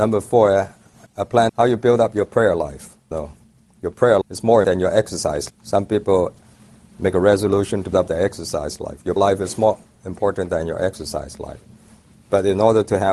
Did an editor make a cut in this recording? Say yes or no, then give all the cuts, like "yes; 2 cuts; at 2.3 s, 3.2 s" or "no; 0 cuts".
yes; 8 cuts; at 1.1 s, 1.5 s, 3.1 s, 4.2 s, 4.6 s, 5.5 s, 7.9 s, 9.2 s